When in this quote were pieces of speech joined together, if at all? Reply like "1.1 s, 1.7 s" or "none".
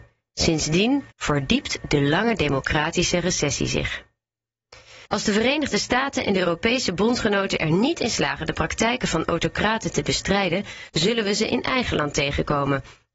1.1 s, 5.1 s